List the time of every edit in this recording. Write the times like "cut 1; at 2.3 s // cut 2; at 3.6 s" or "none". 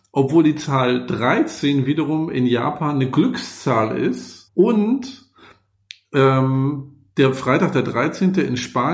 cut 1; at 4.5 s // cut 2; at 7.1 s